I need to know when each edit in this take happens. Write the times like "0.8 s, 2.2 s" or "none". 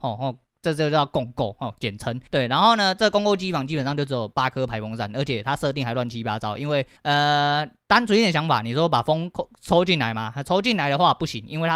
2.3 s, 7.0 s